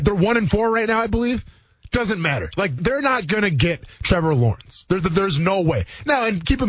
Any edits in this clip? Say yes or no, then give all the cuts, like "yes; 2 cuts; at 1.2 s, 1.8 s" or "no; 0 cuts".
yes; 1 cut; at 2.8 s